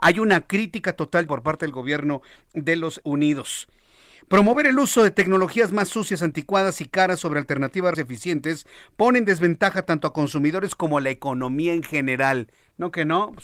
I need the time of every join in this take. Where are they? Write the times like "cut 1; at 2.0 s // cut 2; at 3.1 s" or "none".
cut 1; at 1.3 s // cut 2; at 3.0 s // cut 3; at 7.9 s

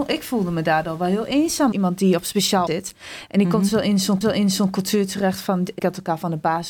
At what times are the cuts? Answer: cut 1; at 1.7 s // cut 2; at 2.7 s // cut 3; at 4.2 s // cut 4; at 5.8 s

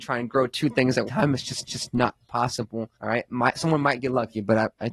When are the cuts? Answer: cut 1; at 1.1 s // cut 2; at 1.7 s // cut 3; at 2.9 s

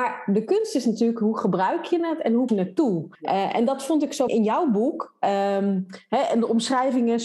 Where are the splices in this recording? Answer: cut 1; at 2.5 s // cut 2; at 3.1 s // cut 3; at 4.3 s

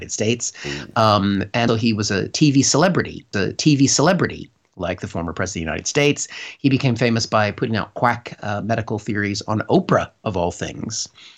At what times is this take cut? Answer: cut 1; at 1.7 s // cut 2; at 3.3 s

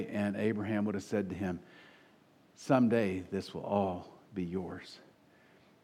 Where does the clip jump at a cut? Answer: none

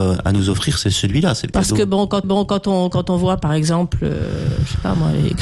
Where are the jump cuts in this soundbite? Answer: cut 1; at 2.2 s

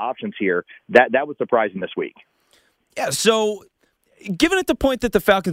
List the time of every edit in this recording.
none

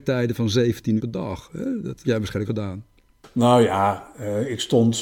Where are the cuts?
cut 1; at 1.0 s // cut 2; at 2.0 s // cut 3; at 2.5 s

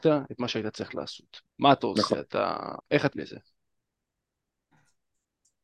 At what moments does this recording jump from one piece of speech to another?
cut 1; at 1.5 s // cut 2; at 2.8 s // cut 3; at 3.1 s

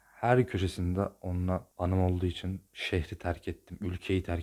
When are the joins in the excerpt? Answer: cut 1; at 1.7 s // cut 2; at 2.7 s

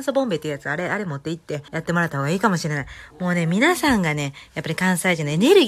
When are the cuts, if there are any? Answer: cut 1; at 1.7 s

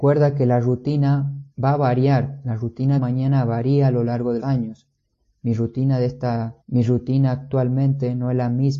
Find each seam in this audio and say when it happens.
cut 1; at 1.5 s // cut 2; at 3.0 s // cut 3; at 4.4 s // cut 4; at 6.6 s

